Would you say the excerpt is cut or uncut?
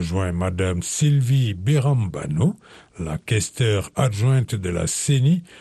uncut